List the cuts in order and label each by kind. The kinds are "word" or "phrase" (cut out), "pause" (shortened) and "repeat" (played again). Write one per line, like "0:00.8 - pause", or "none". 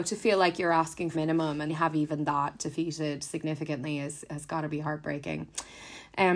0:01.1 - phrase
0:01.7 - word